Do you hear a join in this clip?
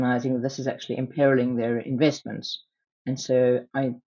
no; 0 cuts

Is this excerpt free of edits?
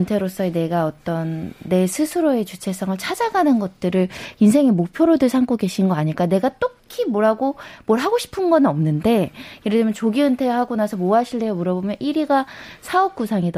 no; 1 cut; at 6.8 s

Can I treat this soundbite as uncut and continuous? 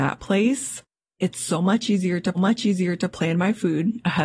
no; 1 cut; at 2.3 s

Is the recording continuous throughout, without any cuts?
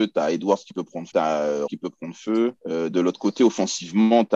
no; 3 cuts; at 1.1 s, 1.7 s, 2.6 s

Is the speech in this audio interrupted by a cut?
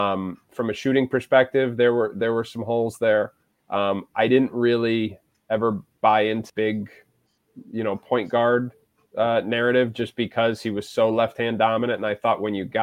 yes; 1 cut; at 6.5 s

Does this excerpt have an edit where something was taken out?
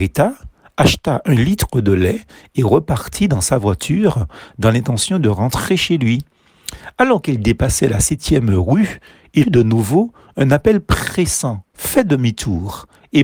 yes; 2 cuts; at 9.4 s, 11.7 s

